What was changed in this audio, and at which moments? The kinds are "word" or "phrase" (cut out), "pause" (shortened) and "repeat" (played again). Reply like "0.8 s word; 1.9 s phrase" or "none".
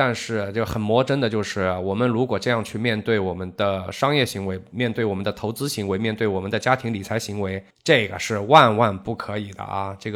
7.7 s pause